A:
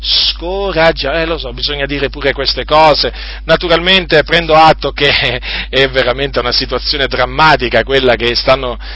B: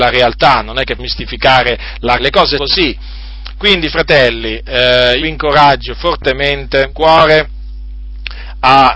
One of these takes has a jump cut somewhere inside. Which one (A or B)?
B